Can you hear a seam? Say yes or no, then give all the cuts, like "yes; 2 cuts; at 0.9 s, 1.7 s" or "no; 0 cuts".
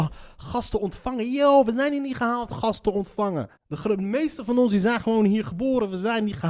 yes; 2 cuts; at 2.5 s, 3.6 s